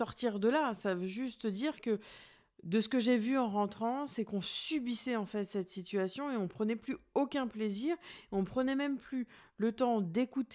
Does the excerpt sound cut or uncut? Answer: uncut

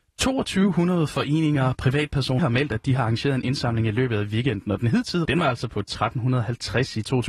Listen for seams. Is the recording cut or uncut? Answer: cut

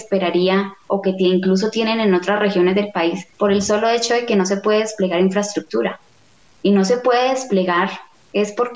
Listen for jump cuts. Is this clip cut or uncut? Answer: cut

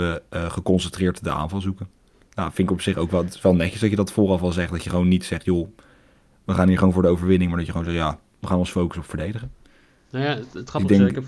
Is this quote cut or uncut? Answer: uncut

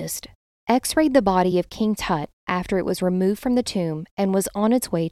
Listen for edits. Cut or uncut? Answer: uncut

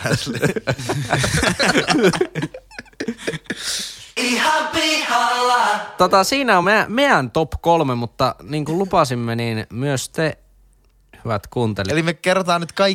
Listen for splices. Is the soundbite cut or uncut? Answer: uncut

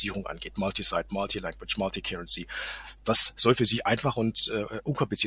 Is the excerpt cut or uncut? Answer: uncut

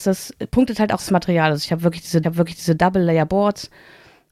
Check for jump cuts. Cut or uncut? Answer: cut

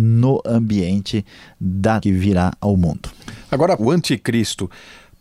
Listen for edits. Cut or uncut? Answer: cut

